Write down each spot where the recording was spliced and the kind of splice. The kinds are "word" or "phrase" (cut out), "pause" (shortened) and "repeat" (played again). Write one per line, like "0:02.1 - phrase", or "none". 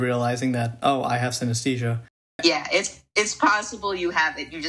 none